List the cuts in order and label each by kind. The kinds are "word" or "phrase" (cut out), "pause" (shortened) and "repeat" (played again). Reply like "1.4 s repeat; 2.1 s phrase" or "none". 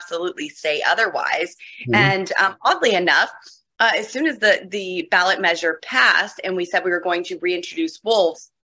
none